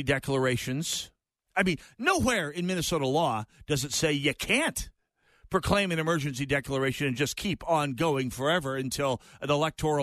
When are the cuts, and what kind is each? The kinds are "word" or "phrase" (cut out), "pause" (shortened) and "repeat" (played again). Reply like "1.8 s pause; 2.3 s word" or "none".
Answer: 1.4 s pause